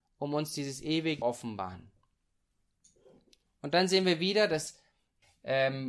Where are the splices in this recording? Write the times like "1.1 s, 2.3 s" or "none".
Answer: 1.2 s